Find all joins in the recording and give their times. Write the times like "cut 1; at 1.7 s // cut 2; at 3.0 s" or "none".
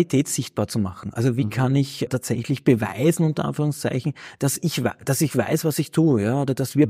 cut 1; at 2.1 s